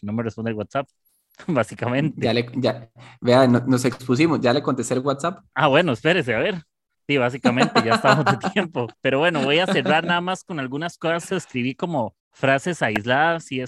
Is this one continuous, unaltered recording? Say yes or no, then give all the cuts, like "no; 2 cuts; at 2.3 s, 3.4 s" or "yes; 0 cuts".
no; 3 cuts; at 6.9 s, 8.9 s, 12.2 s